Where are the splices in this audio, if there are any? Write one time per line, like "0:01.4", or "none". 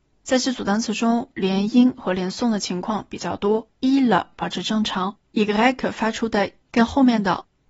0:03.7
0:05.3
0:06.6